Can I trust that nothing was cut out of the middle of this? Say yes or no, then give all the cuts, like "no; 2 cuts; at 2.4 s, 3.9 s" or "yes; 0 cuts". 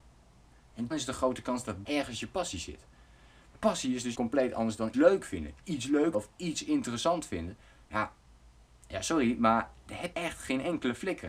no; 7 cuts; at 0.9 s, 1.9 s, 3.5 s, 4.1 s, 4.9 s, 6.1 s, 10.1 s